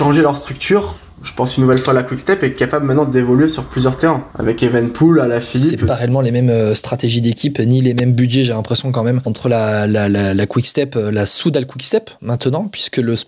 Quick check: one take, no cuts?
no; 1 cut; at 4.3 s

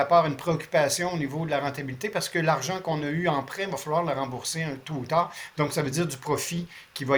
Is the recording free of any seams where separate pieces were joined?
yes; 0 cuts

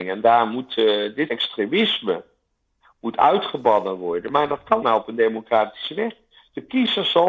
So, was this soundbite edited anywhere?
yes; 2 cuts; at 1.3 s, 4.8 s

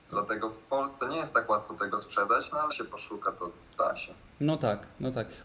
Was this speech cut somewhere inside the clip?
yes; 1 cut; at 2.7 s

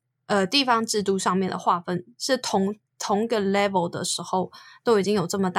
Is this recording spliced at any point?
no; 0 cuts

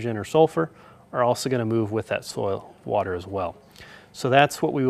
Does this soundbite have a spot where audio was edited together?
no; 0 cuts

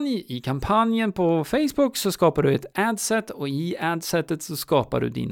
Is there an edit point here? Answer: no; 0 cuts

